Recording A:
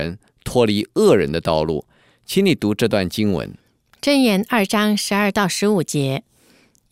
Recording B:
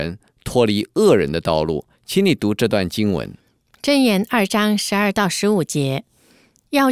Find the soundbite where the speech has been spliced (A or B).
B